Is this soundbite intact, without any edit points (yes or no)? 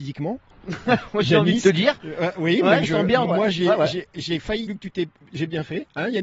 no